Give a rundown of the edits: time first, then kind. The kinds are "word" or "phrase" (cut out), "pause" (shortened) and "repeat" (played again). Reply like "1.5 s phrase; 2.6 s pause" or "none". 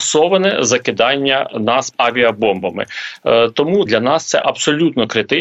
1.9 s word; 3.9 s word